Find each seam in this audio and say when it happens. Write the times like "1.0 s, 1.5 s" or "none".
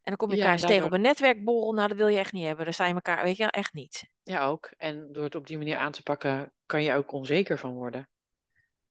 none